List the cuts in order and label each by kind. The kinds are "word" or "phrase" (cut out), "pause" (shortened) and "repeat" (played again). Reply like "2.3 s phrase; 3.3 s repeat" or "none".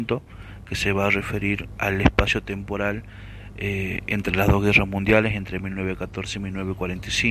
1.8 s word